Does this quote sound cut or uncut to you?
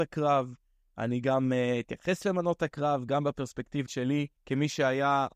cut